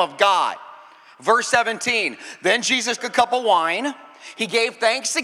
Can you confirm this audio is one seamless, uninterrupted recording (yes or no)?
no